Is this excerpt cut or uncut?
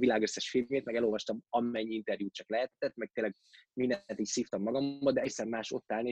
uncut